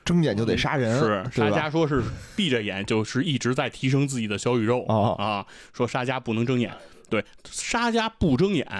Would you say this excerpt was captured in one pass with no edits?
yes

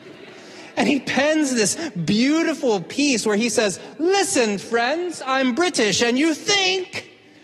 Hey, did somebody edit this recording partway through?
no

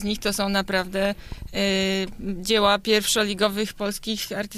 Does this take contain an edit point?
no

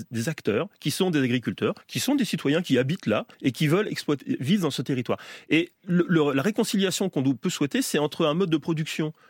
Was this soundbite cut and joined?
yes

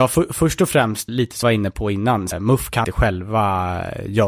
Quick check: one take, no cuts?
no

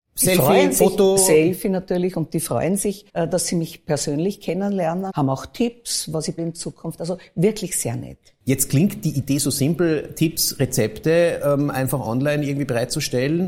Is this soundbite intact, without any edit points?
no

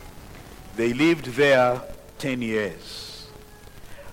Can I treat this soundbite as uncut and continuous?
no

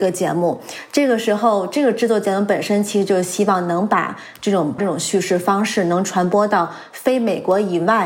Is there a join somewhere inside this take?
yes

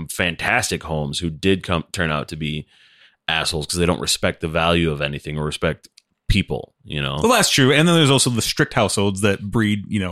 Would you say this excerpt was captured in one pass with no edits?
yes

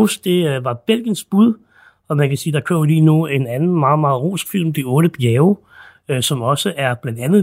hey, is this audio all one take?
yes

